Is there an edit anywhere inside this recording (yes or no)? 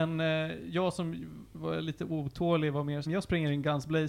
yes